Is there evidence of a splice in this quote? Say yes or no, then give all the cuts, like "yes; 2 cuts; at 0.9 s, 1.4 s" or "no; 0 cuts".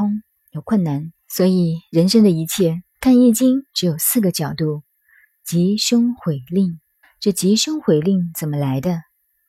yes; 3 cuts; at 1.2 s, 3.0 s, 7.0 s